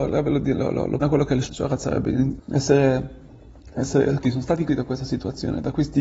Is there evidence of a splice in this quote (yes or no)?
yes